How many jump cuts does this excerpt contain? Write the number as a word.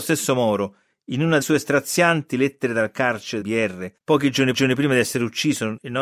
four